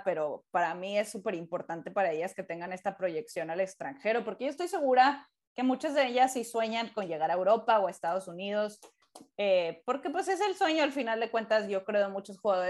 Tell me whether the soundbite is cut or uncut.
uncut